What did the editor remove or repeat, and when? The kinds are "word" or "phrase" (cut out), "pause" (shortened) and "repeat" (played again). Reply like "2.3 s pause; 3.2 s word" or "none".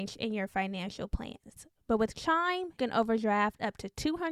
2.8 s word